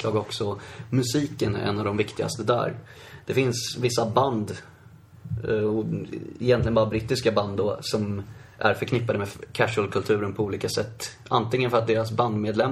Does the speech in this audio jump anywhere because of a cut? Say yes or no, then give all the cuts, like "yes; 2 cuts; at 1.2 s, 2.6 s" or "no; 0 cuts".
no; 0 cuts